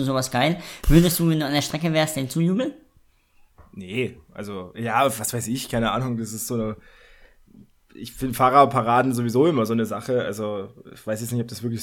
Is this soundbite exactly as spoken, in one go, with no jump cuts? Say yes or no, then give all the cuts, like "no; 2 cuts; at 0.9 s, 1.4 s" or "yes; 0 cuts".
yes; 0 cuts